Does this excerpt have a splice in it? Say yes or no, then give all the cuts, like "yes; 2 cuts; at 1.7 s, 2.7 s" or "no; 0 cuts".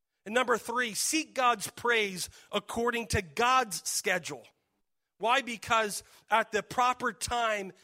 no; 0 cuts